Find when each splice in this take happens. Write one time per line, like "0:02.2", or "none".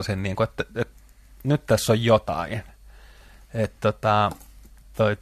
none